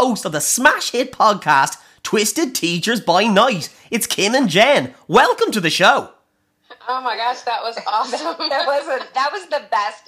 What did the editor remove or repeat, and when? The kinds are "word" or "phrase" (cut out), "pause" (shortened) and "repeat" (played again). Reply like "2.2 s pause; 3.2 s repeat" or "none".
none